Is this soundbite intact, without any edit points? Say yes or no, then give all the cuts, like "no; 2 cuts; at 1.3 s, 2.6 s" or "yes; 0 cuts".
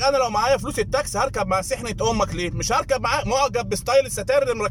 yes; 0 cuts